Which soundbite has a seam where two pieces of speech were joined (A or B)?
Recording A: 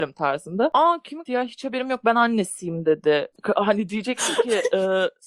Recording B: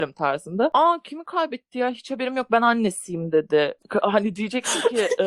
A